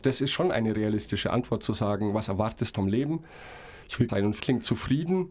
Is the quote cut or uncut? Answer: cut